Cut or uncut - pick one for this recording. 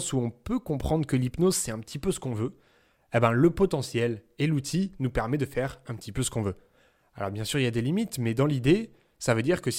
uncut